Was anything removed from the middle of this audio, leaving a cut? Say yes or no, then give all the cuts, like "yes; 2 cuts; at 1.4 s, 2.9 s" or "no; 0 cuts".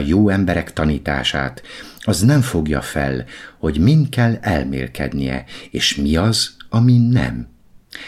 no; 0 cuts